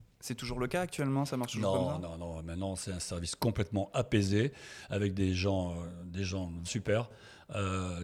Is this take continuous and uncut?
no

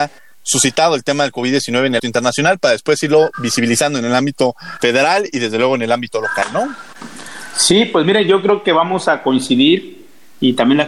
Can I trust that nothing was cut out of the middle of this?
no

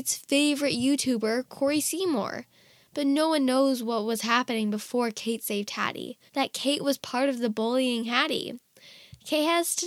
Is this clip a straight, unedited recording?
no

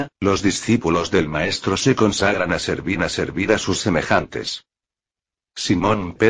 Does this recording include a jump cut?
yes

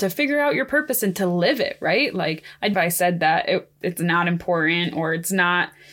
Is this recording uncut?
no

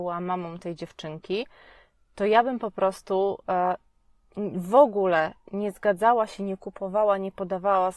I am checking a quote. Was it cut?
no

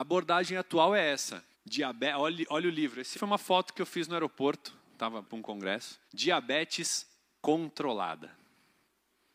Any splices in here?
yes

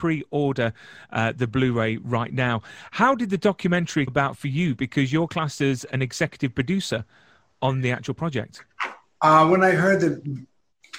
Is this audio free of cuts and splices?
no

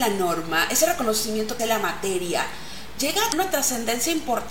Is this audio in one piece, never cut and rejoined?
no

